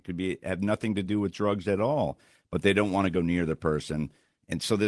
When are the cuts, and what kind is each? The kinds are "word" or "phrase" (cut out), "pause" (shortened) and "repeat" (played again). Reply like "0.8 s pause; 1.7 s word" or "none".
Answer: none